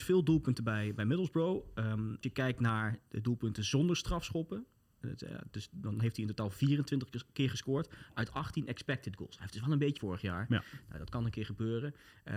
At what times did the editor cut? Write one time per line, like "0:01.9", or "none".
0:02.2
0:10.0